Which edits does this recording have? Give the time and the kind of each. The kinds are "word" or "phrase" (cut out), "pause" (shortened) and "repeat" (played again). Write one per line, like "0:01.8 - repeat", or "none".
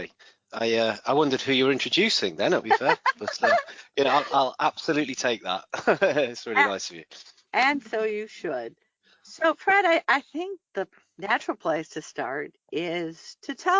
0:02.6 - phrase
0:10.7 - pause